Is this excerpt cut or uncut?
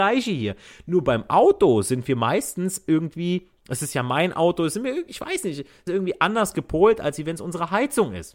cut